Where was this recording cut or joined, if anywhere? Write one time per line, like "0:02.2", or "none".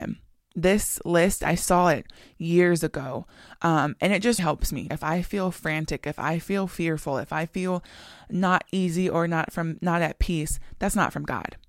0:04.4
0:04.9